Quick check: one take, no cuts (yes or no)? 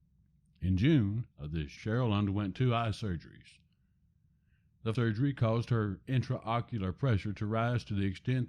no